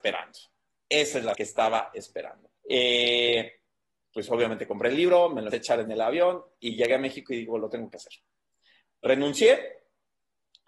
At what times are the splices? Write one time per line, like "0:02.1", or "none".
0:01.3
0:02.6
0:05.5